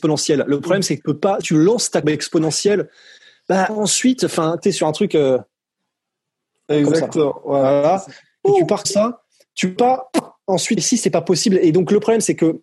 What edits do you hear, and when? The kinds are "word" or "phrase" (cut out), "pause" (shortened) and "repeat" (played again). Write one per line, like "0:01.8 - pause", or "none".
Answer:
0:01.0 - word
0:01.4 - word
0:02.0 - word
0:03.7 - word
0:04.6 - word
0:08.8 - word
0:09.8 - word
0:10.8 - word